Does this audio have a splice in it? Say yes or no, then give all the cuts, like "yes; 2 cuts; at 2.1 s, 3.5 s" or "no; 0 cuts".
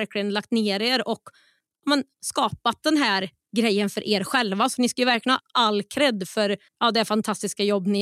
yes; 1 cut; at 6.7 s